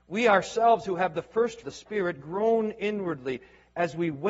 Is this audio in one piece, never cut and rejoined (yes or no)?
no